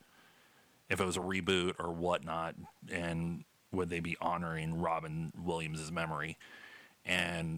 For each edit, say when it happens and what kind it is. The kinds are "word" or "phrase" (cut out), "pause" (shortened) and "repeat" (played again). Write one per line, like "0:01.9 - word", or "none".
none